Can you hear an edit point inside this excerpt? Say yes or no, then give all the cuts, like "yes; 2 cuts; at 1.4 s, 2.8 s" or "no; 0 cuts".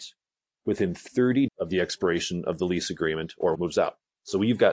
yes; 2 cuts; at 1.5 s, 3.5 s